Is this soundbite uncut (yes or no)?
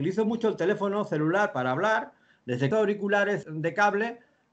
no